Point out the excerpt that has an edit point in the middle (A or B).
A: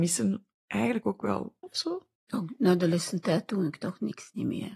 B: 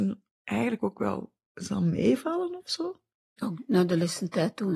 A